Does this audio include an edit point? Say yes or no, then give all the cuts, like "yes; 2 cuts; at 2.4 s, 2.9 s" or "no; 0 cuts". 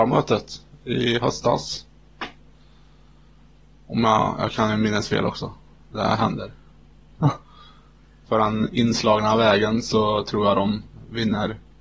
yes; 1 cut; at 8.3 s